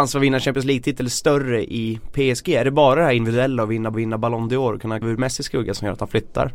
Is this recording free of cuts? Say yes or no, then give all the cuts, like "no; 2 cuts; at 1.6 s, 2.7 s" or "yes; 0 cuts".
no; 2 cuts; at 3.9 s, 5.0 s